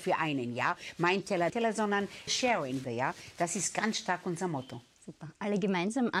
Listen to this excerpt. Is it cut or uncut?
cut